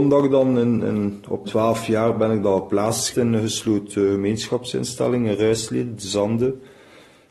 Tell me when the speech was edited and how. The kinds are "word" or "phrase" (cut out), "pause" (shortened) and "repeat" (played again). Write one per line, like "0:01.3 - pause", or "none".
0:01.4 - word
0:03.1 - word